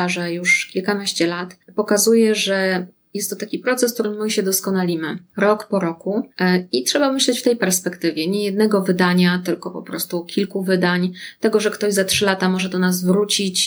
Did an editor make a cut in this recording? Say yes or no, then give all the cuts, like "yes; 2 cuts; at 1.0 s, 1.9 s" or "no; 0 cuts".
no; 0 cuts